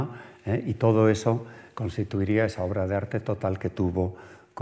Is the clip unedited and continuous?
yes; 0 cuts

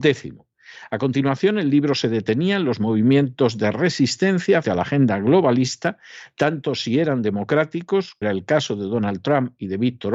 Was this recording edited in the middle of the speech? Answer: yes; 2 cuts; at 4.6 s, 8.2 s

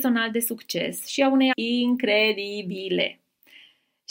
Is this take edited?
yes; 1 cut; at 1.5 s

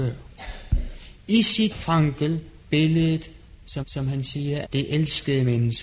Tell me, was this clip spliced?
yes; 4 cuts; at 1.7 s, 2.6 s, 3.8 s, 4.6 s

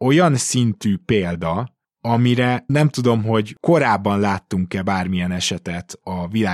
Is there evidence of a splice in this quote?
yes; 1 cut; at 2.7 s

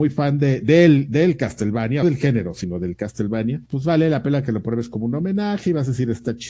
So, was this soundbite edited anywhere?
yes; 2 cuts; at 2.0 s, 3.7 s

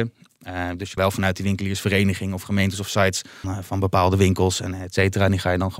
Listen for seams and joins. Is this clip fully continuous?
no; 2 cuts; at 1.0 s, 3.4 s

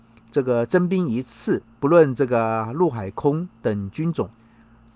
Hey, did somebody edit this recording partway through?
yes; 1 cut; at 1.7 s

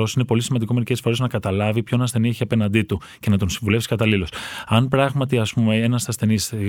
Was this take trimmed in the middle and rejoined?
no; 0 cuts

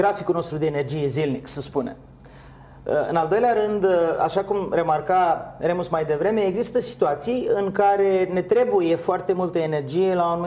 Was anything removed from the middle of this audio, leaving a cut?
no; 0 cuts

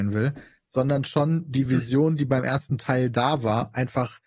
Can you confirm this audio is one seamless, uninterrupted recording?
yes; 0 cuts

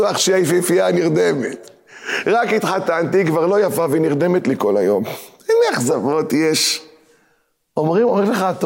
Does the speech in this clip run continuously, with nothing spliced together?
yes; 0 cuts

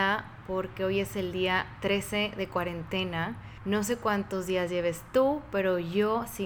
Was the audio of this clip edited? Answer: no; 0 cuts

